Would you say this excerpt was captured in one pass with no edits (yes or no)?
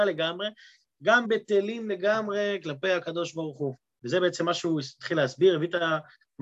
no